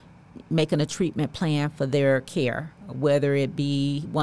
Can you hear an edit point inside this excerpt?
no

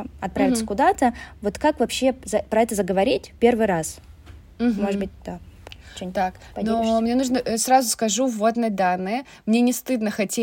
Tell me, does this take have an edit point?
no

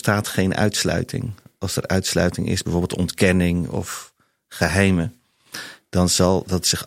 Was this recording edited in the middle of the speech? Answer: no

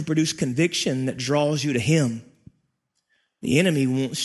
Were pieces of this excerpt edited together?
no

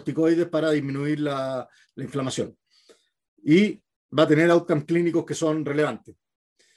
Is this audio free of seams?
yes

